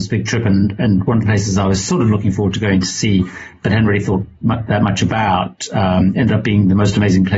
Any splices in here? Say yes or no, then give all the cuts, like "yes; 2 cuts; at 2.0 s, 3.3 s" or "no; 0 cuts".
yes; 1 cut; at 4.3 s